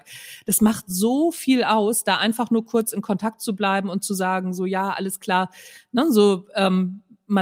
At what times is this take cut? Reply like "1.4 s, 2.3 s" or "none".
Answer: none